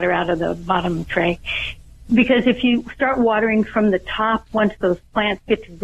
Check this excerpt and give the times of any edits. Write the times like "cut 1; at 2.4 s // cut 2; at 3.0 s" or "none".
none